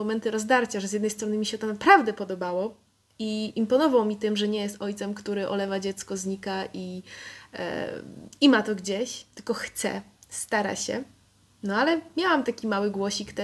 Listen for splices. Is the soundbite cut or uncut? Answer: uncut